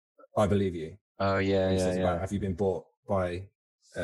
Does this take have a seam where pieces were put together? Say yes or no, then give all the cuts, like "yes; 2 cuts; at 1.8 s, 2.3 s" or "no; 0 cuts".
no; 0 cuts